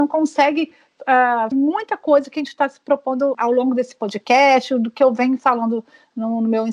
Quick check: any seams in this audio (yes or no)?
yes